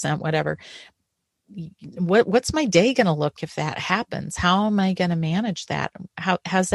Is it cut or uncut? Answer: cut